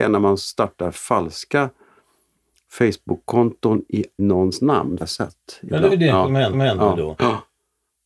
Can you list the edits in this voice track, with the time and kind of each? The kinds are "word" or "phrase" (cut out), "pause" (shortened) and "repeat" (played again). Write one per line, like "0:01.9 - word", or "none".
0:04.2 - word
0:05.0 - phrase
0:05.9 - phrase
0:06.5 - repeat